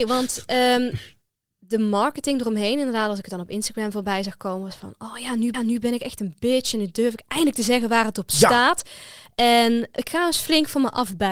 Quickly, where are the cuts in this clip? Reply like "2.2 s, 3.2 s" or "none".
5.5 s, 10.0 s